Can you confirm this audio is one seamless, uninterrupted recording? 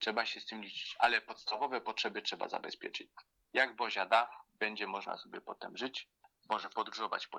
yes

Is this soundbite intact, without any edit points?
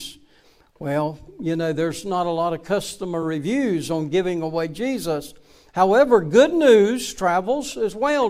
yes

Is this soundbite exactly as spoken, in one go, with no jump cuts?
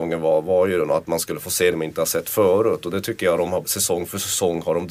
no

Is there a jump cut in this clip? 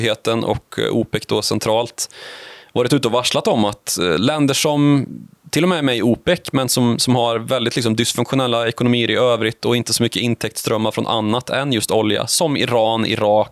no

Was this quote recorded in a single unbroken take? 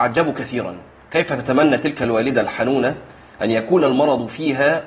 yes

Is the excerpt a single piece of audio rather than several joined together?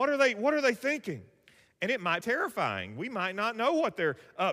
no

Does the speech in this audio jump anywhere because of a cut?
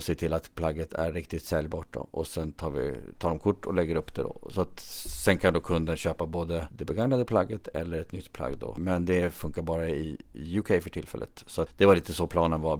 no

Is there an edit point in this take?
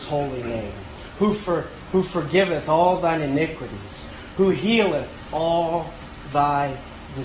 no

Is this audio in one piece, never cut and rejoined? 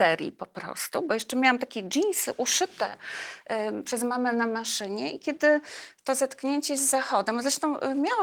yes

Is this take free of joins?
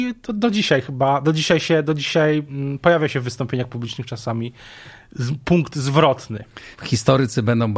no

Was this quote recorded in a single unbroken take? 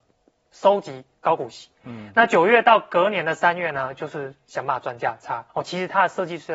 no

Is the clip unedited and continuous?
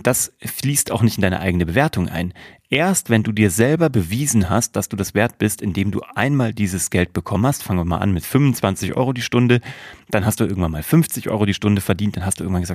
yes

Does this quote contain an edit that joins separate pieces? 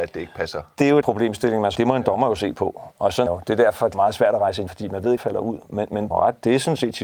yes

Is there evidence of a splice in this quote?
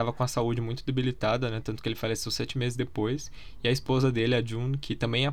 no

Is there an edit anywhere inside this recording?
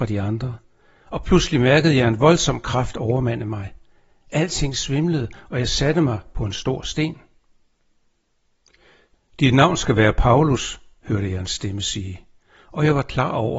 no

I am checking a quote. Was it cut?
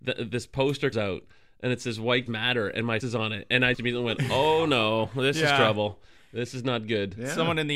yes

